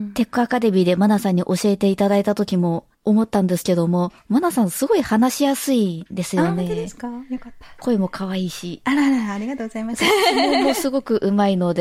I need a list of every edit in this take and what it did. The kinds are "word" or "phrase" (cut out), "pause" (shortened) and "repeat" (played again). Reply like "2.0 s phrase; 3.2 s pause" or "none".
2.9 s pause